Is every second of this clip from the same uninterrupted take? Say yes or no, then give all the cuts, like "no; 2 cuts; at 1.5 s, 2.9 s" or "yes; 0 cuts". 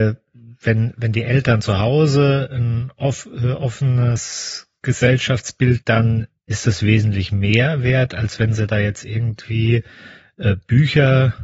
no; 1 cut; at 5.8 s